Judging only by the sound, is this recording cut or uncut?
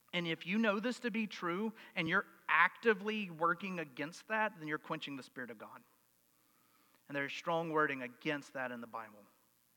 uncut